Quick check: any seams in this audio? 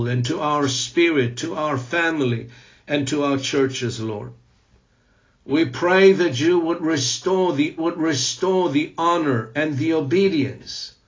yes; 1 cut; at 7.8 s

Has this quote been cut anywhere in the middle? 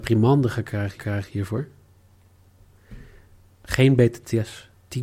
yes; 1 cut; at 1.0 s

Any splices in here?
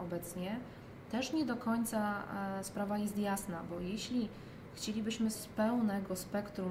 yes; 1 cut; at 5.3 s

